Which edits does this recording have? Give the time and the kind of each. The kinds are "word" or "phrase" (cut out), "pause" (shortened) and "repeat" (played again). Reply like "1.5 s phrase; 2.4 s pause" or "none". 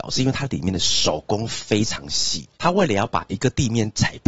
2.5 s pause